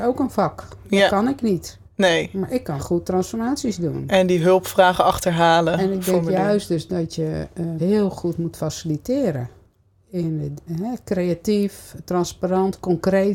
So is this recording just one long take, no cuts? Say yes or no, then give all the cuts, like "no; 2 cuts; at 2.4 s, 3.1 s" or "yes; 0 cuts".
no; 4 cuts; at 1.9 s, 2.8 s, 7.8 s, 10.7 s